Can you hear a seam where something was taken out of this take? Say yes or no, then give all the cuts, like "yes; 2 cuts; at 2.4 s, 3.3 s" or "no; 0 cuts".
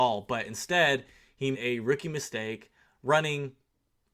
yes; 2 cuts; at 1.5 s, 2.9 s